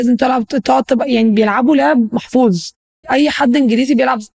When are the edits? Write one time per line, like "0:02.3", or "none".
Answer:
0:03.0